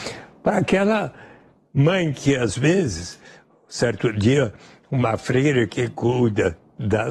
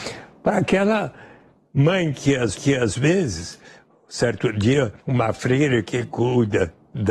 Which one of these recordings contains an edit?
second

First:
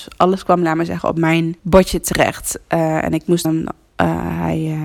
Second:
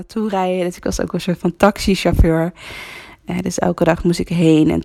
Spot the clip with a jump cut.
first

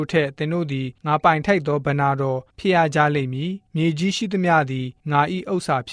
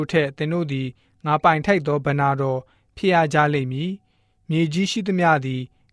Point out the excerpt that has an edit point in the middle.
first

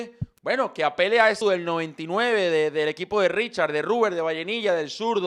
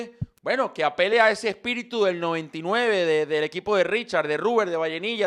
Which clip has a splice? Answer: first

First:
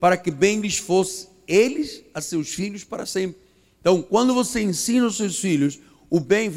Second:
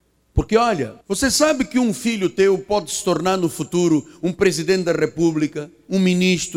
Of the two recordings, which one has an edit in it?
second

